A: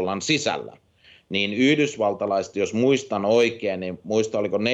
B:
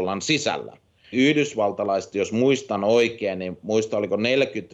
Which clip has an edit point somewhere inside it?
B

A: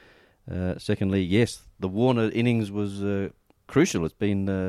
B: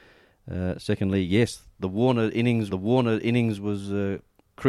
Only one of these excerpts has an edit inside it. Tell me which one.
B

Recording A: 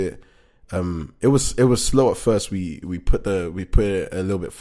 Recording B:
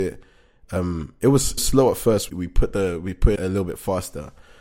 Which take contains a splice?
B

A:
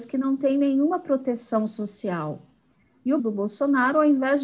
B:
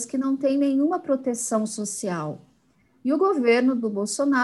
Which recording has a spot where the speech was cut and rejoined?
A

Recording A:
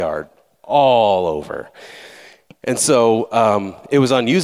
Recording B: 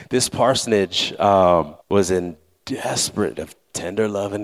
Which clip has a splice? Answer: B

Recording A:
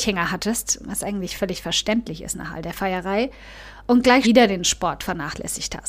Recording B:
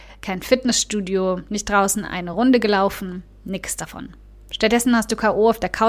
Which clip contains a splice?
A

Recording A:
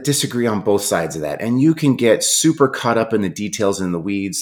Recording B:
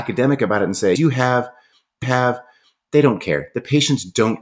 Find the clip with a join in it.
B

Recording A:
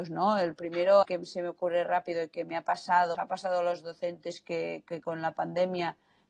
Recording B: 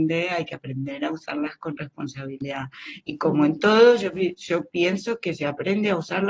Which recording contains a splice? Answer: A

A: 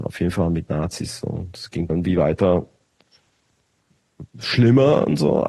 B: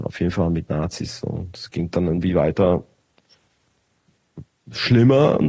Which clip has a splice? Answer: A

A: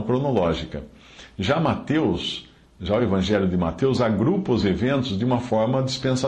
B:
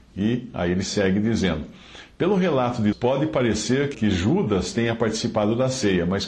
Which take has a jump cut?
B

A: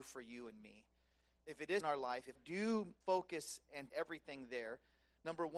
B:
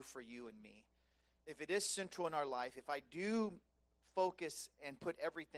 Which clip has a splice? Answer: A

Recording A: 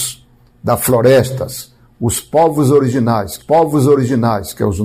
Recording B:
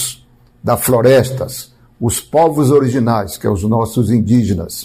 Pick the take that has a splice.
A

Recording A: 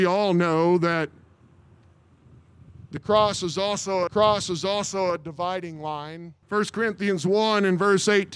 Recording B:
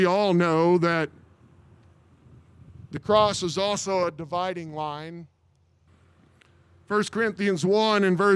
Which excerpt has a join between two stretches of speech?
A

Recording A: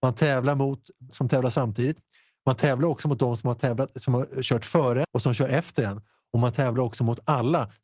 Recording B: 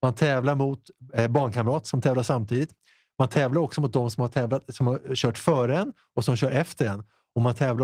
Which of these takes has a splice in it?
A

